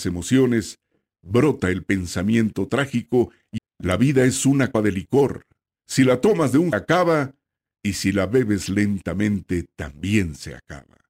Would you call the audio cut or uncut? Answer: cut